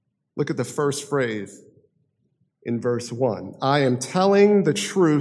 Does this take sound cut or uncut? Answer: uncut